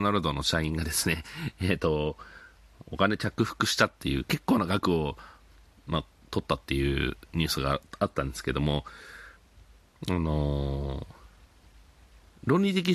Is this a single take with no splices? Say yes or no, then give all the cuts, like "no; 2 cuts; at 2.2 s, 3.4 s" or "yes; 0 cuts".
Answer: yes; 0 cuts